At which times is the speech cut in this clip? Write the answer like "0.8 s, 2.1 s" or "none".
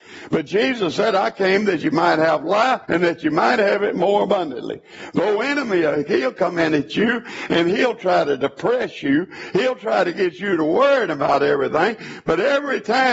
2.8 s